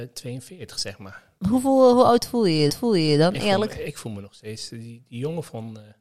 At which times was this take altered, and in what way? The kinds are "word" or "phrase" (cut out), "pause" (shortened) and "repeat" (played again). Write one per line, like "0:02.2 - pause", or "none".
0:01.4 - pause
0:02.7 - repeat